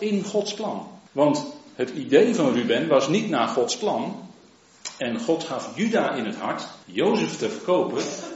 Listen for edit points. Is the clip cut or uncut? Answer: cut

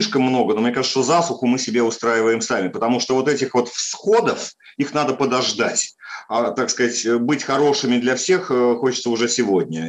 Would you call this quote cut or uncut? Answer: uncut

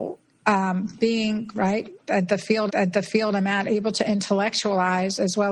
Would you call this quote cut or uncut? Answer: cut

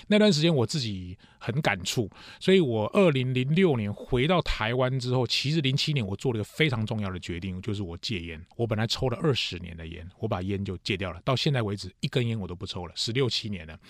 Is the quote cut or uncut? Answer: cut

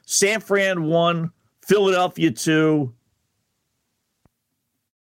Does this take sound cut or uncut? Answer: uncut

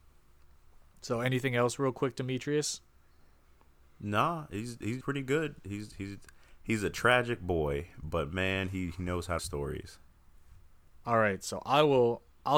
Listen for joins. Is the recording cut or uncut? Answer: cut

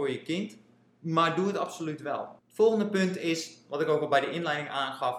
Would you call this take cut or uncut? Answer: cut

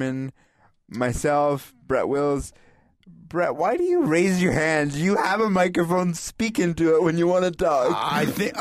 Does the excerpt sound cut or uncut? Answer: uncut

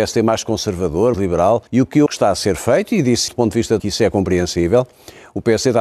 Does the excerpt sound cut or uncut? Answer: cut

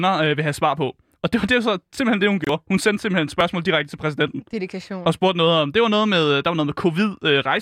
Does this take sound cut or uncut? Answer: uncut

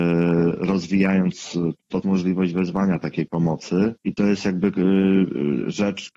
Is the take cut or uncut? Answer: cut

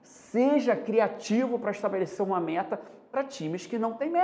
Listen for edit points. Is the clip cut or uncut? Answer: uncut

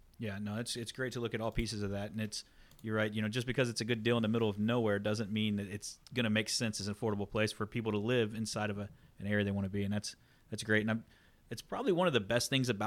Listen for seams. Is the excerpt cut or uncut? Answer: uncut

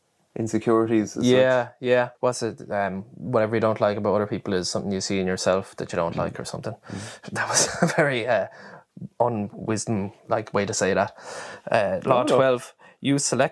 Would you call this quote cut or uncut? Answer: cut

